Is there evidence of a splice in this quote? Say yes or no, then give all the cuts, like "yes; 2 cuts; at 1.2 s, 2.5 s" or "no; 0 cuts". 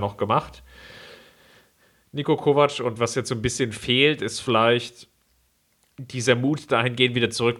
no; 0 cuts